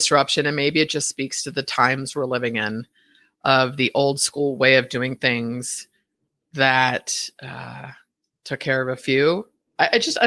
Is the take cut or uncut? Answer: uncut